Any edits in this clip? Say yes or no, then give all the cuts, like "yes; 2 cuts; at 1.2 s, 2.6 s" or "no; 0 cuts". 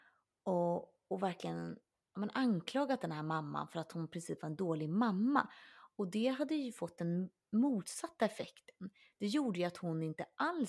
no; 0 cuts